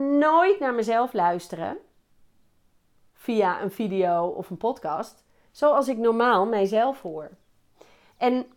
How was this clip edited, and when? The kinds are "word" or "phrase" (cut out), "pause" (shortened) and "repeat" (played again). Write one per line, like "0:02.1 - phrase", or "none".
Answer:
none

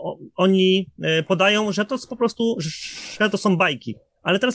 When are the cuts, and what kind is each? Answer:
none

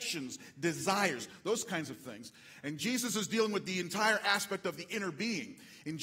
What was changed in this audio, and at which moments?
none

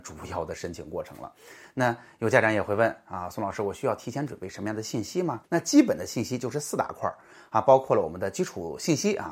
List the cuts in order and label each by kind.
0:05.4 - pause

